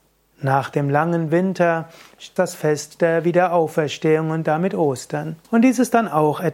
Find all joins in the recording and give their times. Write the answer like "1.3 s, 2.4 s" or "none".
2.4 s, 5.4 s